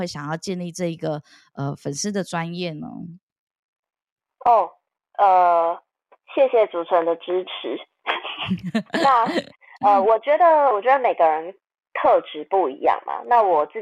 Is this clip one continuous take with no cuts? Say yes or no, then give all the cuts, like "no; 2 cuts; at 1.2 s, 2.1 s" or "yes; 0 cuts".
yes; 0 cuts